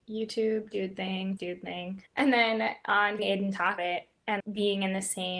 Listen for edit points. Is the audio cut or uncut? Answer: cut